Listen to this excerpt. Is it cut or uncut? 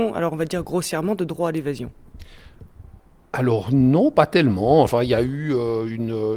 uncut